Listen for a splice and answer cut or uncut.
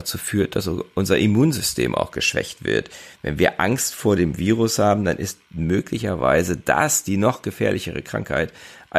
cut